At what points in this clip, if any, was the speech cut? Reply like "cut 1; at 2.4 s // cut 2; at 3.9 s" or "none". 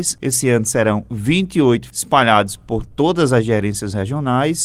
cut 1; at 1.9 s